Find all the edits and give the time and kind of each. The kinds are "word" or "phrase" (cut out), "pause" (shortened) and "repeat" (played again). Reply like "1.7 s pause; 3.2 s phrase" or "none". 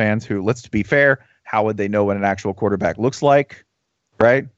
none